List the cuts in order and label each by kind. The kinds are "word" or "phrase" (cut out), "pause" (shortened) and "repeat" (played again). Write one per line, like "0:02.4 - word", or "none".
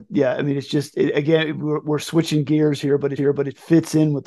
0:03.2 - repeat